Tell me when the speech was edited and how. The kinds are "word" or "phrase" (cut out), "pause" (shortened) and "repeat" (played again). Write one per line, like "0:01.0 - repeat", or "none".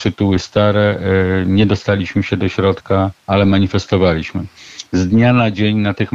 0:03.2 - pause